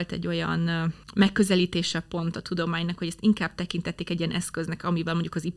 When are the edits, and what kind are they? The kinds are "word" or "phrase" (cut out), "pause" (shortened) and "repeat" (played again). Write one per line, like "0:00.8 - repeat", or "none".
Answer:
0:01.0 - pause